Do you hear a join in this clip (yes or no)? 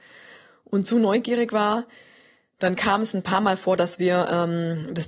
no